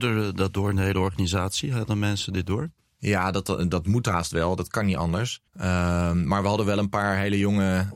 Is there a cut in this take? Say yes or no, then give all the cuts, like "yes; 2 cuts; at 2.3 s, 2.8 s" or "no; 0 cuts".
yes; 2 cuts; at 2.8 s, 5.5 s